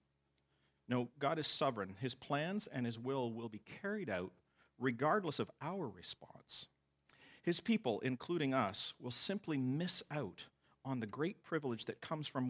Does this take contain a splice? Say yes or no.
no